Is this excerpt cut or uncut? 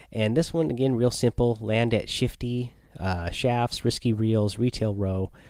uncut